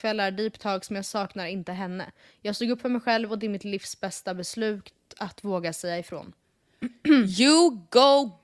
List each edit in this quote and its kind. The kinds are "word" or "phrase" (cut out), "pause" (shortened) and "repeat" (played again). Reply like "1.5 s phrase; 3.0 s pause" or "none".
none